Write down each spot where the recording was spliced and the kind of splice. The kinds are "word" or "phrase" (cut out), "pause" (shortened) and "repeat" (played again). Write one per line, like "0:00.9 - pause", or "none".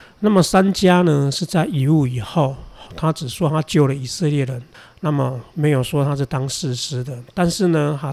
0:02.9 - word
0:04.7 - pause